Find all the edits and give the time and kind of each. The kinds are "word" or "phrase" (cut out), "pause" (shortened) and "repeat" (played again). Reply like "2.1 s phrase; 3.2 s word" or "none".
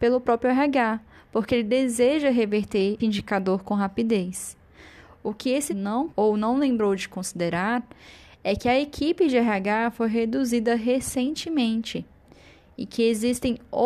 3.0 s word; 5.7 s word; 6.1 s word